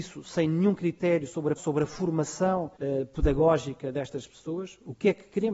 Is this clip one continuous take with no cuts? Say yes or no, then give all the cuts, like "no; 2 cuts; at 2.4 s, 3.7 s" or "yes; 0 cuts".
no; 2 cuts; at 1.6 s, 2.8 s